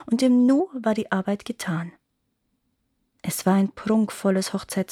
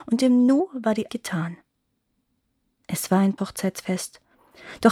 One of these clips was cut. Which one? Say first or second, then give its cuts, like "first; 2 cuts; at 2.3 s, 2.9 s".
second; 2 cuts; at 1.1 s, 3.4 s